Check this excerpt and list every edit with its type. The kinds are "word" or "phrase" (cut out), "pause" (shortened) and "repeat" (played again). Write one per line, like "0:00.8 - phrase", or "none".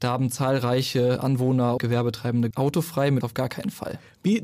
0:01.8 - word
0:02.5 - word
0:03.2 - word